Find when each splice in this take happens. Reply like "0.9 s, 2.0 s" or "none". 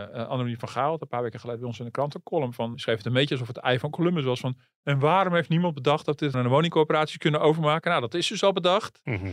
2.7 s, 6.3 s